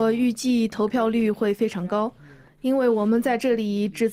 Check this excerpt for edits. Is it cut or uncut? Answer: uncut